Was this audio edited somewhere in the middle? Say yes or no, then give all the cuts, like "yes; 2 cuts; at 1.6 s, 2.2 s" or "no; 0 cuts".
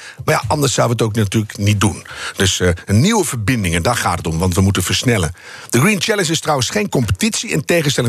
no; 0 cuts